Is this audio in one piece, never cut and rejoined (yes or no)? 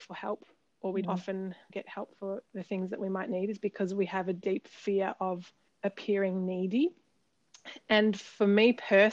no